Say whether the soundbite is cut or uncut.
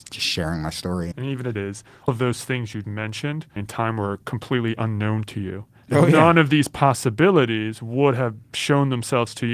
cut